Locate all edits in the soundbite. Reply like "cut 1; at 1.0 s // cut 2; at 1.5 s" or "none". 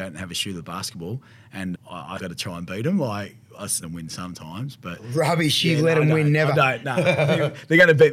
cut 1; at 1.7 s // cut 2; at 2.2 s // cut 3; at 3.8 s

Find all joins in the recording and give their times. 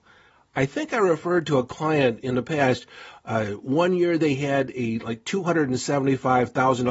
none

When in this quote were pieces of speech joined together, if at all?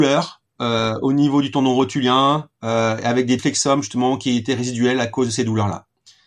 cut 1; at 3.4 s

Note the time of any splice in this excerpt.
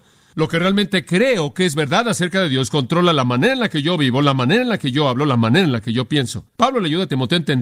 cut 1; at 6.5 s

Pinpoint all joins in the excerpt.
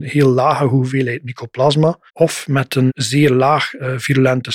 cut 1; at 2.1 s // cut 2; at 2.9 s

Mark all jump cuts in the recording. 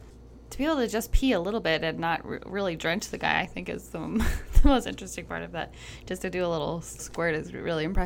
cut 1; at 7.0 s

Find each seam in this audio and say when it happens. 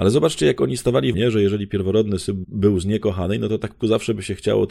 cut 1; at 1.1 s // cut 2; at 2.4 s // cut 3; at 3.8 s

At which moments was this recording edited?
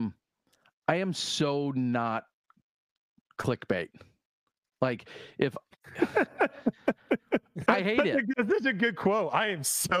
cut 1; at 7.7 s // cut 2; at 8.3 s

